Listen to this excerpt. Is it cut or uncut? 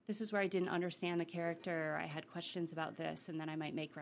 uncut